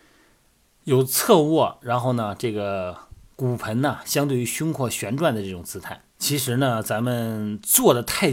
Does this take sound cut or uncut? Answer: cut